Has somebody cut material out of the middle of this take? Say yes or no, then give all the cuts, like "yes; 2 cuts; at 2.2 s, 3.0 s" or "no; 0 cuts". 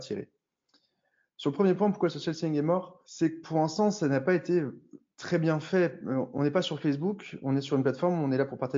yes; 1 cut; at 3.0 s